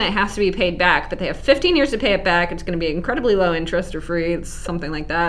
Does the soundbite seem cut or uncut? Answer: uncut